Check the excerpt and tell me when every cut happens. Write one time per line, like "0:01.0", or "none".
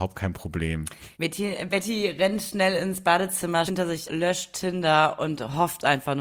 0:01.1
0:03.7
0:04.1